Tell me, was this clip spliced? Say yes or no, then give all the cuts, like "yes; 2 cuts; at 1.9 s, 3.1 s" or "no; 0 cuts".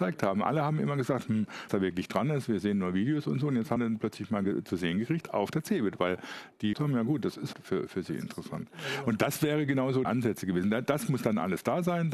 yes; 5 cuts; at 1.7 s, 3.8 s, 6.7 s, 7.5 s, 10.0 s